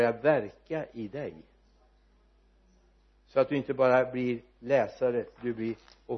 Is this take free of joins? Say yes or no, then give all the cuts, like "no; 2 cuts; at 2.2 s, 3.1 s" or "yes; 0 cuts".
yes; 0 cuts